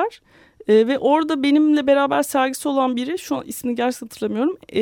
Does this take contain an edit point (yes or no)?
no